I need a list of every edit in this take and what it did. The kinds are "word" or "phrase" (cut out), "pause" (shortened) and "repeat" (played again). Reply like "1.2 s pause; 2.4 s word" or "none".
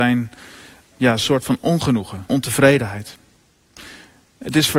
0.9 s word; 2.3 s word

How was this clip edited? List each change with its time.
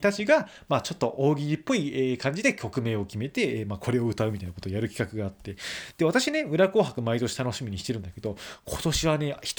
none

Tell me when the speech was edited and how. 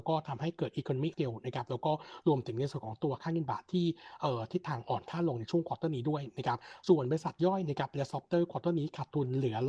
1.1 s word

